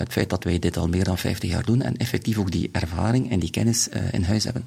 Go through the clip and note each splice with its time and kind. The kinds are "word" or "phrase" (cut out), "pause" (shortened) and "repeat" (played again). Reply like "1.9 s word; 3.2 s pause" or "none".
none